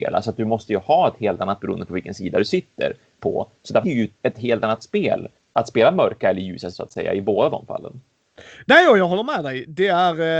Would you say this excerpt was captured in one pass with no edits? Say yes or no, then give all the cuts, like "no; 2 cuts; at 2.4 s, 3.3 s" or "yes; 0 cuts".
no; 5 cuts; at 1.6 s, 3.8 s, 4.2 s, 5.4 s, 6.7 s